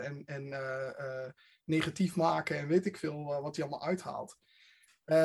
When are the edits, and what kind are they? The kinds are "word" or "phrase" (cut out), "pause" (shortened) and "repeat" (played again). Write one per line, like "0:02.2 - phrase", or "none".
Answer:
none

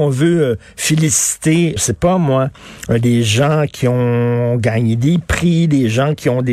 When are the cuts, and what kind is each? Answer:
0:01.8 - word

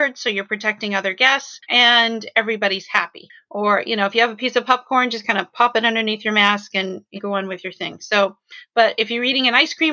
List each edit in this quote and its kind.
0:01.6 - pause
0:07.2 - phrase

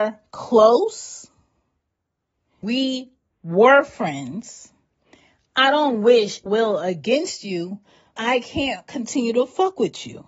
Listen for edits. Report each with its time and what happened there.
0:02.6 - word
0:06.5 - word
0:08.2 - word

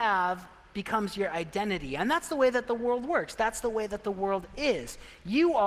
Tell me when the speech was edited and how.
none

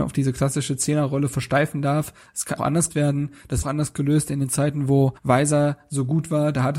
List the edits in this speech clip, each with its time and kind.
0:02.6 - word
0:02.9 - word
0:03.6 - phrase
0:05.2 - pause

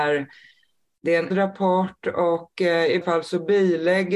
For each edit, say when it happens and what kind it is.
0:01.3 - word
0:03.0 - word

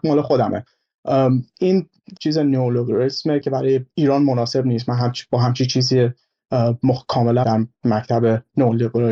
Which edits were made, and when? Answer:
0:02.2 - word
0:07.4 - word

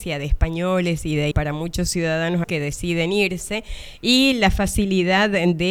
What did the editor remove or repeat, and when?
0:01.3 - word
0:02.4 - word

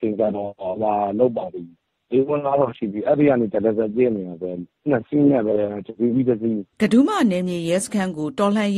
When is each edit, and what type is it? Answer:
0:06.7 - pause

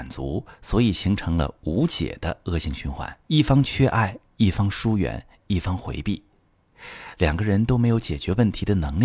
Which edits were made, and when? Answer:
0:03.2 - pause
0:05.4 - phrase

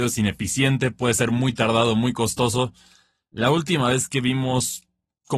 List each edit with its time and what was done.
none

